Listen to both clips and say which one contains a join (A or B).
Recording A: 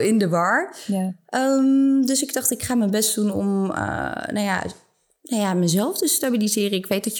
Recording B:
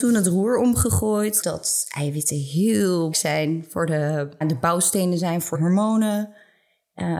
B